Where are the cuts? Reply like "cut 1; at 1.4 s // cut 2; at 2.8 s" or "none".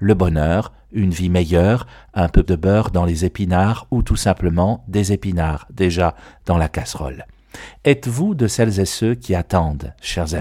cut 1; at 2.4 s

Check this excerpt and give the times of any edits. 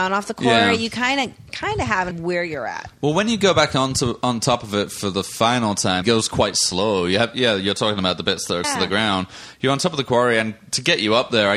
cut 1; at 2.1 s // cut 2; at 6.0 s // cut 3; at 8.6 s

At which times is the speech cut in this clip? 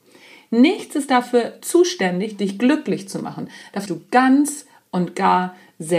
cut 1; at 3.9 s

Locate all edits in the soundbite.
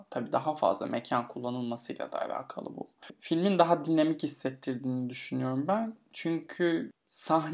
none

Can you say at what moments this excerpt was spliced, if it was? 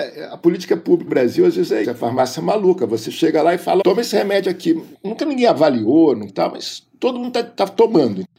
cut 1; at 1.1 s // cut 2; at 1.8 s // cut 3; at 3.8 s // cut 4; at 6.3 s

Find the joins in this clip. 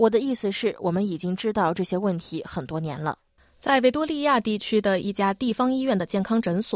cut 1; at 3.4 s

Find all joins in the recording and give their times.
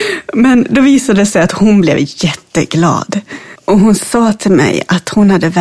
cut 1; at 3.6 s

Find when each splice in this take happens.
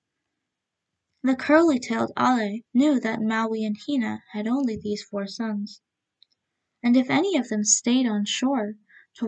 cut 1; at 2.7 s

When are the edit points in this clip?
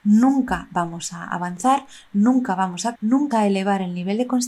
cut 1; at 2.9 s // cut 2; at 3.3 s

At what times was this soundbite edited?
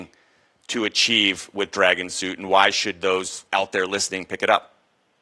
cut 1; at 3.5 s

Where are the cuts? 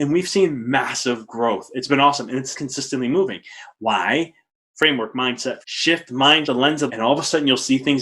cut 1; at 2.5 s // cut 2; at 5.6 s // cut 3; at 6.4 s // cut 4; at 6.9 s

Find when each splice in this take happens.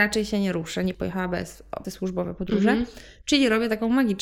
cut 1; at 0.9 s // cut 2; at 1.8 s

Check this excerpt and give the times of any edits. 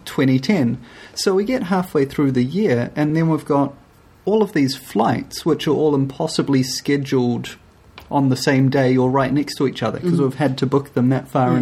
none

